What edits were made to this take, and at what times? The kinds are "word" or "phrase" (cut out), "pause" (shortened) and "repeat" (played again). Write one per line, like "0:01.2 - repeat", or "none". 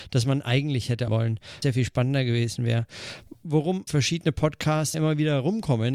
0:01.1 - word
0:01.6 - word
0:03.9 - word
0:04.9 - word